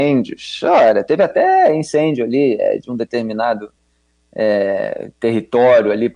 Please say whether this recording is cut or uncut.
uncut